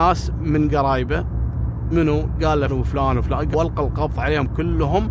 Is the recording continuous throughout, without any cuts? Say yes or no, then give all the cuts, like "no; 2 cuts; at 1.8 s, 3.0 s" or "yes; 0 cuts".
no; 3 cuts; at 1.9 s, 2.7 s, 3.5 s